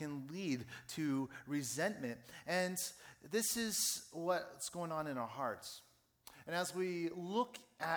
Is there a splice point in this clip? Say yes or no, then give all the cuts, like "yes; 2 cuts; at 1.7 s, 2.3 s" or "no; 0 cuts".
no; 0 cuts